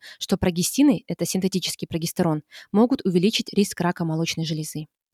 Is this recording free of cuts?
yes; 0 cuts

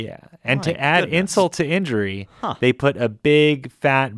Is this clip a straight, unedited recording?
yes; 0 cuts

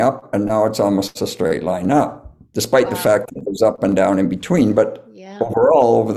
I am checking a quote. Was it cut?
no; 0 cuts

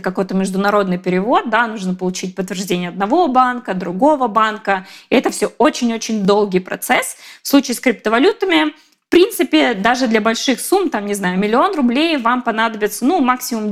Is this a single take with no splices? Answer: yes; 0 cuts

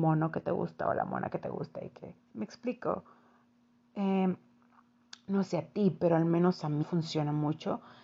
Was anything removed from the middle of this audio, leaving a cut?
yes; 2 cuts; at 2.2 s, 6.8 s

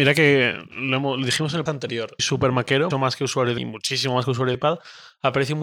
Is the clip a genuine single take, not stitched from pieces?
no; 5 cuts; at 1.7 s, 2.2 s, 2.9 s, 3.6 s, 4.5 s

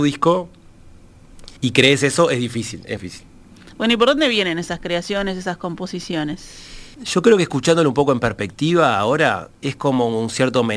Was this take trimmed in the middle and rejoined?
yes; 4 cuts; at 1.6 s, 3.0 s, 6.9 s, 9.5 s

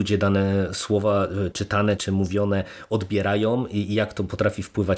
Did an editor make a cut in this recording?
yes; 2 cuts; at 1.5 s, 2.0 s

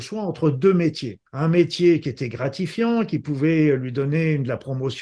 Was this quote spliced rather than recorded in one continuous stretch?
yes; 1 cut; at 1.3 s

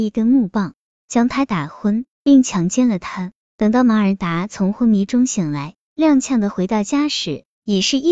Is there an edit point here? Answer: yes; 1 cut; at 2.1 s

